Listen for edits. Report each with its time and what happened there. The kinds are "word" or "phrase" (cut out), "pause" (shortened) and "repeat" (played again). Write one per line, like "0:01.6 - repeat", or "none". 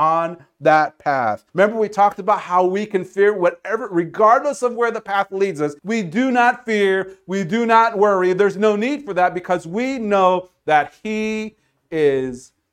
0:01.5 - pause
0:05.8 - pause